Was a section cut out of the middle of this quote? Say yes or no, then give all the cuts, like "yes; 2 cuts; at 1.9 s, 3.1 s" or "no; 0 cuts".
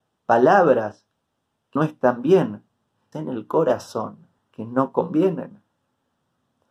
yes; 3 cuts; at 1.8 s, 3.1 s, 4.4 s